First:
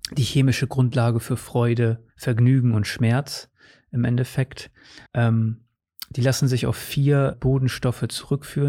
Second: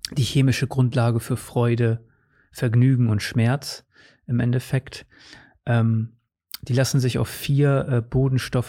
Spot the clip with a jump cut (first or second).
first